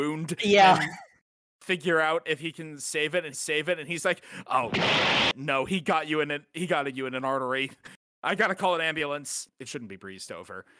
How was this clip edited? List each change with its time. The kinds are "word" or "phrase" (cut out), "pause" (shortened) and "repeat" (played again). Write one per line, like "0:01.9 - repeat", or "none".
0:03.3 - repeat